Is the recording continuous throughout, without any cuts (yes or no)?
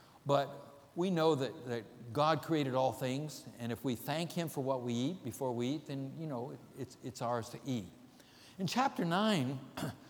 yes